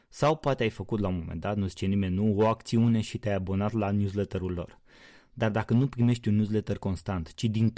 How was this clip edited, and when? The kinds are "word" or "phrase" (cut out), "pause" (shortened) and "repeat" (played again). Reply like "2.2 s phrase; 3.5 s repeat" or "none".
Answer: none